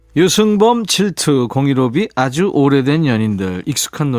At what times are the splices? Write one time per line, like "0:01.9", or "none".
none

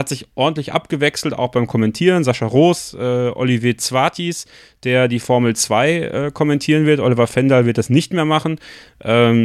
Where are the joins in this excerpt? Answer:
none

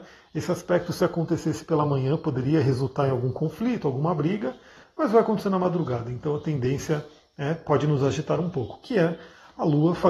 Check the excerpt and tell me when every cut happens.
none

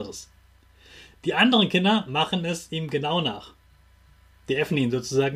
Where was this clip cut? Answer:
none

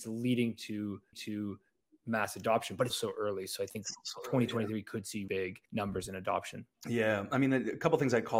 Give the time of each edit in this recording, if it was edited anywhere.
0:01.1
0:02.9
0:05.3
0:05.7
0:06.7

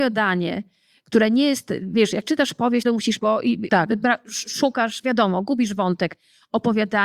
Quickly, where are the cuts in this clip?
0:02.8
0:03.2

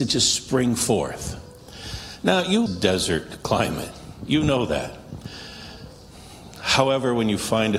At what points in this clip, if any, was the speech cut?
0:02.7

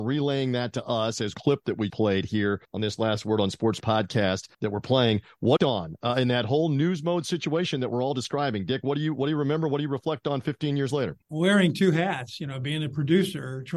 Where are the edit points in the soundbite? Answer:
0:01.3
0:01.9
0:02.6
0:03.8
0:04.5
0:05.6
0:11.2

